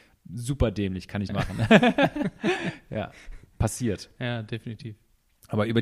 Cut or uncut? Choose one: cut